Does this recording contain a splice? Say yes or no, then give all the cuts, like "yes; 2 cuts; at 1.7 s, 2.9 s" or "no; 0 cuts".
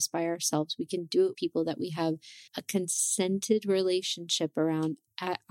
yes; 2 cuts; at 1.3 s, 2.5 s